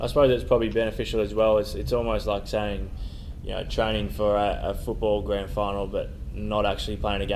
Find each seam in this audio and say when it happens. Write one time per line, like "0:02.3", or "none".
none